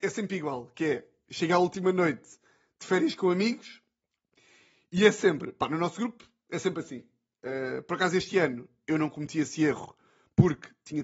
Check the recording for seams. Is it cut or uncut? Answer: uncut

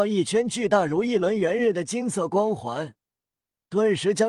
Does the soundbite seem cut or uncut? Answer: uncut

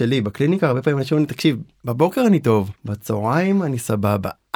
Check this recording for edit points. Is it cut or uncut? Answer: cut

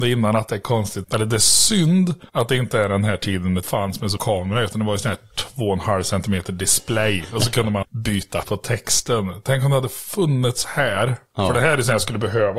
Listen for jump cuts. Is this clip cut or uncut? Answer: cut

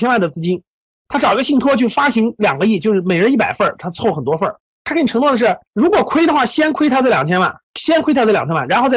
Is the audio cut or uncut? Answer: cut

